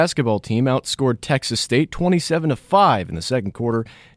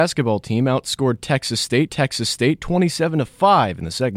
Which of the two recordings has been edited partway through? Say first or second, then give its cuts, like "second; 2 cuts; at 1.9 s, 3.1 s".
second; 1 cut; at 1.9 s